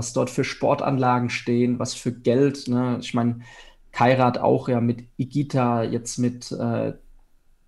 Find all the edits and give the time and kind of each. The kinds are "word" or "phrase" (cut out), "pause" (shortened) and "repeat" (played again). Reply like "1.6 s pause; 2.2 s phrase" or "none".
none

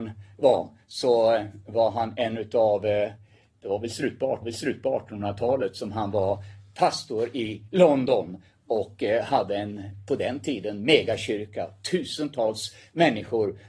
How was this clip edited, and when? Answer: 4.4 s repeat

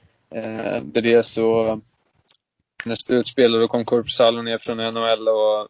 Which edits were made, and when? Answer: 0.9 s word; 2.9 s phrase; 4.6 s word

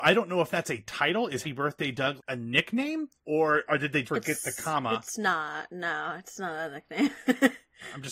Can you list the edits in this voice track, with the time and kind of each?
1.4 s word; 2.2 s word; 3.2 s pause; 4.1 s word

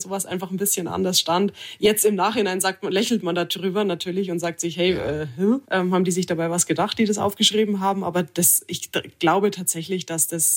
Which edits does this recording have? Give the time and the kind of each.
5.6 s pause

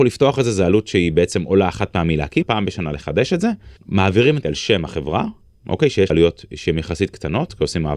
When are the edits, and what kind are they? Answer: 2.4 s phrase; 3.8 s pause; 4.4 s word; 6.1 s word

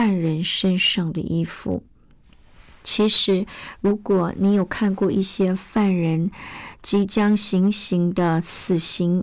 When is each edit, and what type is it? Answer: none

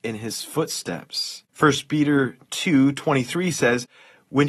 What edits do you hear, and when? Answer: 1.5 s pause

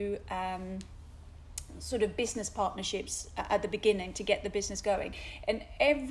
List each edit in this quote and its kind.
none

